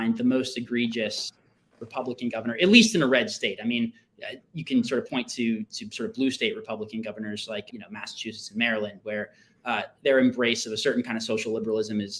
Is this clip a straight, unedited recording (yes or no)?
no